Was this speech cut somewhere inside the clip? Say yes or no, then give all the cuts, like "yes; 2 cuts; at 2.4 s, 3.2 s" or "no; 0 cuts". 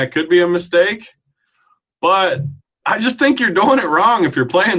yes; 1 cut; at 2.6 s